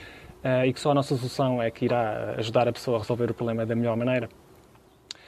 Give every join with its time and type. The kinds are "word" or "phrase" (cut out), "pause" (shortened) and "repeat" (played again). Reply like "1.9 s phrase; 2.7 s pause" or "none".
none